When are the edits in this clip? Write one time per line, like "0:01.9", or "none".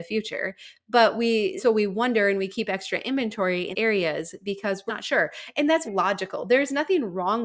0:01.6
0:03.7
0:04.9
0:05.8